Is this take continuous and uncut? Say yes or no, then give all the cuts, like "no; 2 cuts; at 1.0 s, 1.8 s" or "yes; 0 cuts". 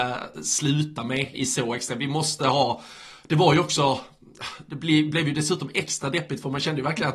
no; 1 cut; at 1.3 s